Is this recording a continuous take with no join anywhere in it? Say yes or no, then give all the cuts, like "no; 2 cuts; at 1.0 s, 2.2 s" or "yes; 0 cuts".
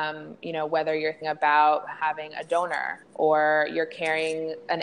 no; 2 cuts; at 1.2 s, 3.0 s